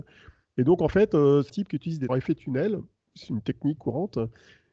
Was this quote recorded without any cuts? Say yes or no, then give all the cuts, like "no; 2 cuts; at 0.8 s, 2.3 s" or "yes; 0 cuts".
no; 3 cuts; at 1.5 s, 2.1 s, 3.8 s